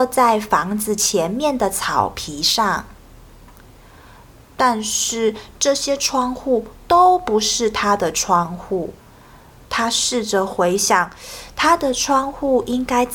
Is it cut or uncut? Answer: uncut